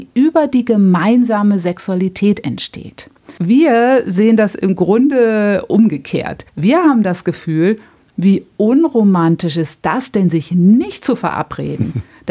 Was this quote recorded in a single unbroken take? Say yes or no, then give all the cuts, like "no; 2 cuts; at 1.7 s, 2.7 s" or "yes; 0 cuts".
no; 2 cuts; at 3.4 s, 6.5 s